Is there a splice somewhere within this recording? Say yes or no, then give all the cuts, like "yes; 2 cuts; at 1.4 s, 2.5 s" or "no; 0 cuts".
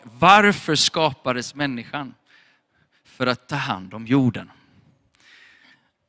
no; 0 cuts